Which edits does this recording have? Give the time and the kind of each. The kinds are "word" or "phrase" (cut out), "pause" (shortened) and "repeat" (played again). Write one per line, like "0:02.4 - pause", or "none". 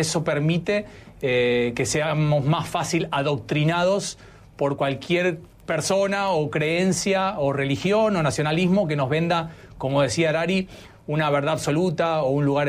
none